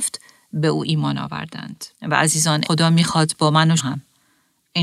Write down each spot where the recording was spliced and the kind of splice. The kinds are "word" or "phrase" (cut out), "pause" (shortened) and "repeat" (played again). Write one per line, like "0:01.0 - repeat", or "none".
0:01.9 - pause
0:02.6 - word
0:03.8 - word